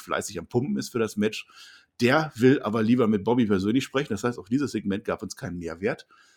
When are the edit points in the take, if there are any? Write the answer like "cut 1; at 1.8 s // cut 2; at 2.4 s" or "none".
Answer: none